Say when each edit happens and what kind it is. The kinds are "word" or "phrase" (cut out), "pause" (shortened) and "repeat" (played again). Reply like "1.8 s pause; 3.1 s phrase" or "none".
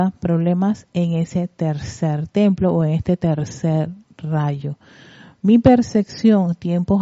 none